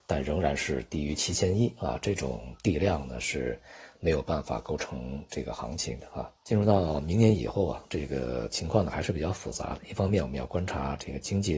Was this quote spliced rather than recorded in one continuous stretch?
yes; 1 cut; at 6.4 s

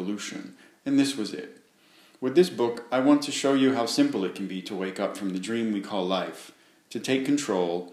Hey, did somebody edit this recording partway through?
no; 0 cuts

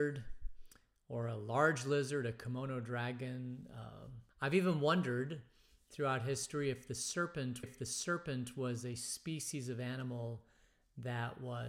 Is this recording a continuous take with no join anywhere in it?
no; 2 cuts; at 4.3 s, 7.6 s

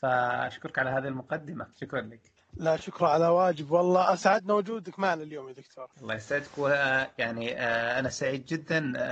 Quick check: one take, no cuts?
no; 3 cuts; at 1.7 s, 2.4 s, 5.9 s

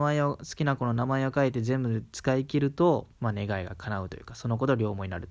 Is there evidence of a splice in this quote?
yes; 1 cut; at 3.1 s

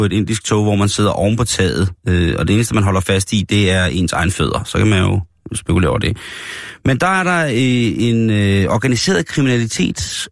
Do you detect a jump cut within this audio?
yes; 1 cut; at 2.0 s

